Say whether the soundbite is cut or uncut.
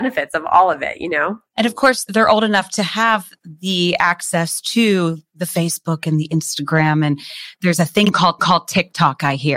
cut